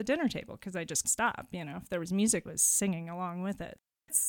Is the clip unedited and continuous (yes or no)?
no